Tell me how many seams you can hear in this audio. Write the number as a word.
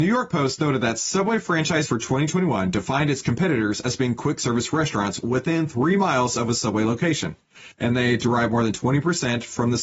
two